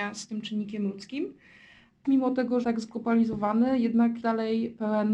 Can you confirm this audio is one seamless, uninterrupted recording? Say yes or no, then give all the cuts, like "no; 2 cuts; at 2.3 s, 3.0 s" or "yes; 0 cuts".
no; 3 cuts; at 2.0 s, 2.6 s, 4.2 s